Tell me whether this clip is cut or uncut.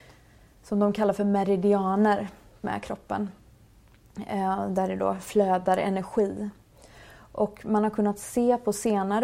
cut